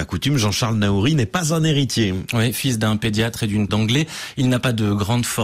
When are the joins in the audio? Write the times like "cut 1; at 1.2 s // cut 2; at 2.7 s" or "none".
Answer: cut 1; at 3.7 s